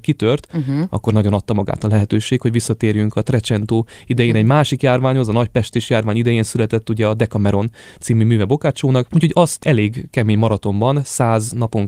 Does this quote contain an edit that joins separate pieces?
no; 0 cuts

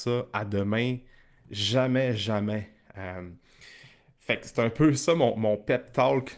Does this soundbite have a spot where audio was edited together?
no; 0 cuts

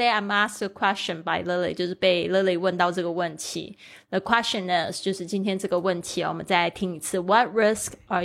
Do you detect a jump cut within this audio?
no; 0 cuts

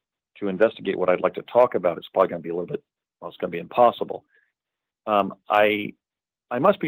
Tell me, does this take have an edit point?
no; 0 cuts

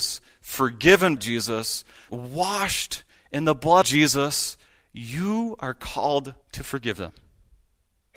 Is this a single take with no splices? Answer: no; 5 cuts; at 1.2 s, 2.1 s, 3.8 s, 4.7 s, 6.4 s

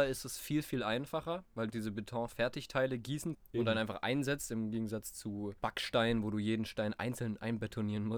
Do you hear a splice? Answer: yes; 3 cuts; at 1.7 s, 3.3 s, 5.6 s

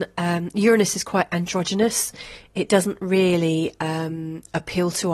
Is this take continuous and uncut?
yes; 0 cuts

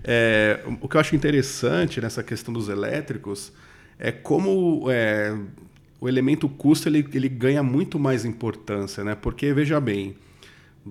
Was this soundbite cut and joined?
no; 0 cuts

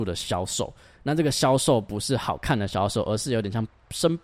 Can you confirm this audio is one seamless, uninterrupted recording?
yes; 0 cuts

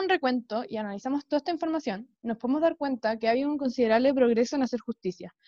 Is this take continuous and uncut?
yes; 0 cuts

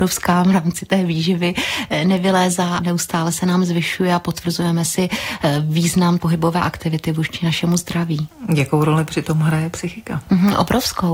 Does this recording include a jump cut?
yes; 2 cuts; at 2.8 s, 6.2 s

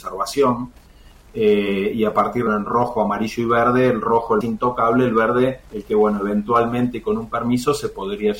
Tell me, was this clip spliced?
yes; 3 cuts; at 2.5 s, 4.4 s, 5.7 s

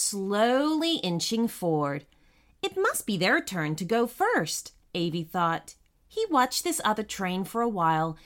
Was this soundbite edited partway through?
no; 0 cuts

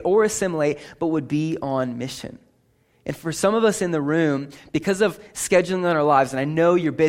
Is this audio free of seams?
yes; 0 cuts

